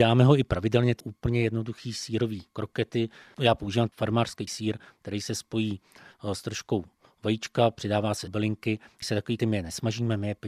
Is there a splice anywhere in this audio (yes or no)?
yes